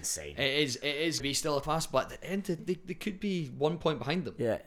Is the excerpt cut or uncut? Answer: cut